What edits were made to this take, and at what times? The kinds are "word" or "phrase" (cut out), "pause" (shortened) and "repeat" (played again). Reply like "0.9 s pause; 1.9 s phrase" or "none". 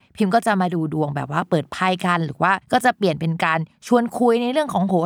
2.6 s pause

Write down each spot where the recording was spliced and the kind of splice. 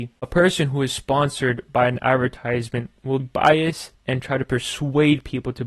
3.2 s word

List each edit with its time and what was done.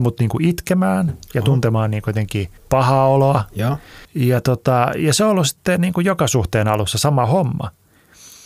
2.6 s pause; 4.0 s pause

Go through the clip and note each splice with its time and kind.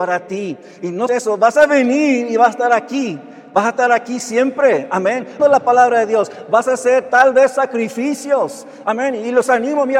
1.1 s word; 5.4 s word

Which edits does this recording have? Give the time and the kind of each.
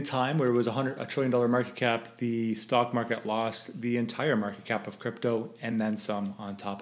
none

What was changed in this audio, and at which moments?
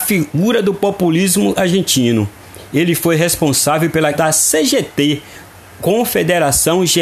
4.1 s word

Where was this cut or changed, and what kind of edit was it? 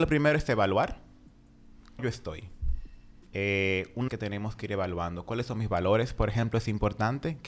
2.0 s word; 4.1 s phrase

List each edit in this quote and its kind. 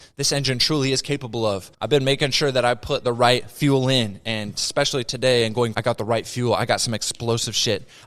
1.7 s pause; 5.7 s word

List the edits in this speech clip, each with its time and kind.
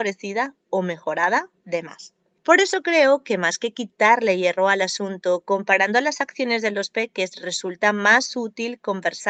none

